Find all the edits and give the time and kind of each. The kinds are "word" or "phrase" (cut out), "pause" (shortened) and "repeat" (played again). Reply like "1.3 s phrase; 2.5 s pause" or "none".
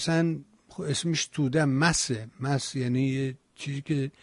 none

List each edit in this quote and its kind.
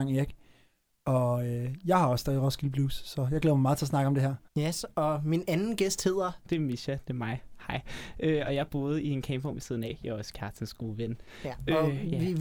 4.5 s pause

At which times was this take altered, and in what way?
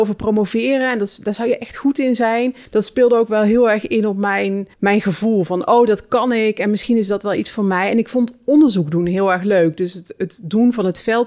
2.7 s pause; 4.7 s pause

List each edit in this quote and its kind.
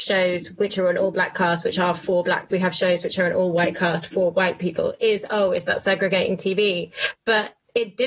2.5 s phrase

